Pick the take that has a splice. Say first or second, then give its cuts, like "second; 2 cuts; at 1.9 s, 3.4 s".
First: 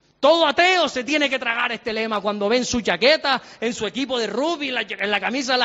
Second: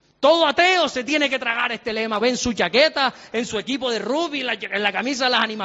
second; 1 cut; at 2.2 s